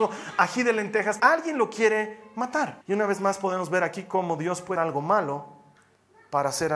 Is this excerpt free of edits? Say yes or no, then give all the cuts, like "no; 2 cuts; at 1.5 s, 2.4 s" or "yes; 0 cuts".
no; 3 cuts; at 1.2 s, 2.8 s, 4.8 s